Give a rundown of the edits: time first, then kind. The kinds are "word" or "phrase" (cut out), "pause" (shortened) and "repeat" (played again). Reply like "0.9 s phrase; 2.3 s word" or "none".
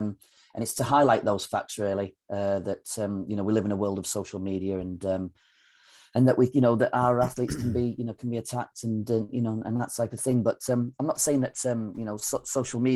none